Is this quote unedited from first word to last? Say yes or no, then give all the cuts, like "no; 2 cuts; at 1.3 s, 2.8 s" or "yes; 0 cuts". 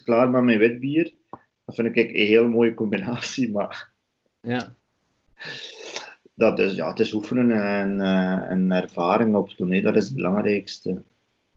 yes; 0 cuts